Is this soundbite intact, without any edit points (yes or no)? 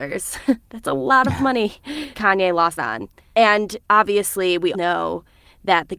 no